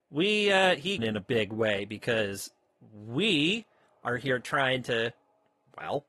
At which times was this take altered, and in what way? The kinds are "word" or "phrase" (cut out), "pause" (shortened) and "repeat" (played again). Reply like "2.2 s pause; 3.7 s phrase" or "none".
1.0 s phrase